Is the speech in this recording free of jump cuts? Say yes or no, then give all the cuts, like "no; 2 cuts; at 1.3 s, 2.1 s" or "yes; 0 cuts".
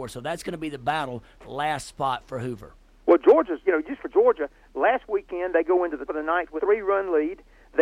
no; 5 cuts; at 1.4 s, 3.6 s, 4.0 s, 6.1 s, 6.6 s